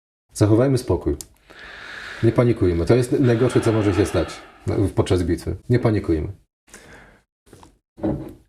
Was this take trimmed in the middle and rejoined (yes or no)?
yes